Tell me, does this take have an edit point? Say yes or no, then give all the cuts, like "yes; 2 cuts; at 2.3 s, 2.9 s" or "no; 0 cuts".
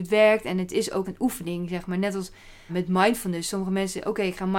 yes; 2 cuts; at 1.0 s, 2.7 s